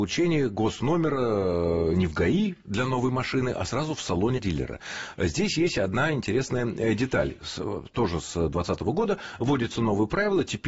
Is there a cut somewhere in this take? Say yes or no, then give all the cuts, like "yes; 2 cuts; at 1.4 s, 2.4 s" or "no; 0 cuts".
yes; 1 cut; at 4.4 s